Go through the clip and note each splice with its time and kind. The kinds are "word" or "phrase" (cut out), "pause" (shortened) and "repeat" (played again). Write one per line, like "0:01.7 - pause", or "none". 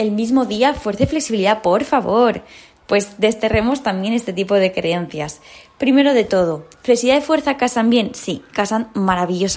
none